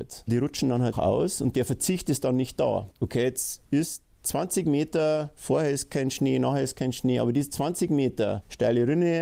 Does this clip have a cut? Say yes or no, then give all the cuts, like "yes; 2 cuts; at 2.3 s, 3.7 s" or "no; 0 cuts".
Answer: yes; 1 cut; at 0.9 s